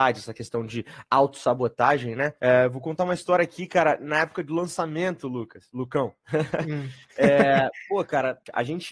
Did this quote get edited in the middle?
yes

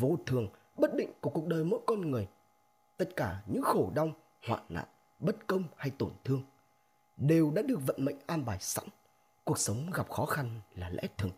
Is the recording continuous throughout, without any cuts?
yes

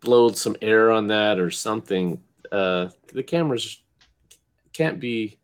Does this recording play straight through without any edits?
no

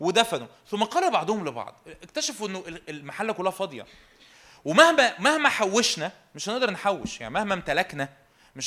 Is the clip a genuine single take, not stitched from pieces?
yes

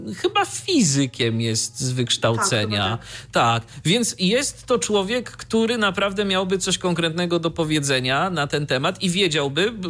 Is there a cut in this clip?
no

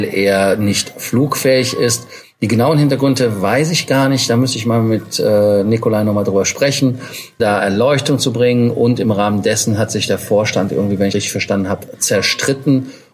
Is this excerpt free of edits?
no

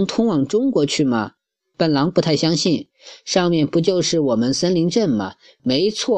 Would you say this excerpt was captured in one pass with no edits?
yes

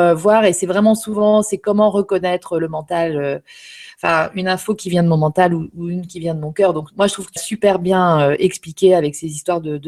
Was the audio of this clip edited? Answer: yes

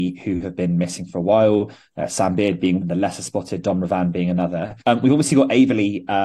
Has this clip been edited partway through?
yes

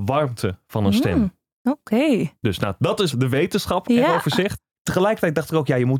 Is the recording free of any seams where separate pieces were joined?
no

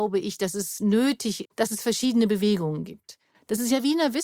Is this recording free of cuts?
no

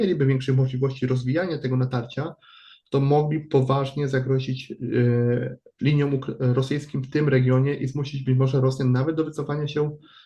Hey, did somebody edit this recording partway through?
no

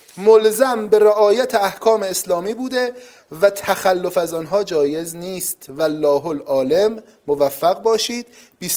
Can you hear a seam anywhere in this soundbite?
no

